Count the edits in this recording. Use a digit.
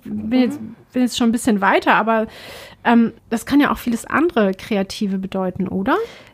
1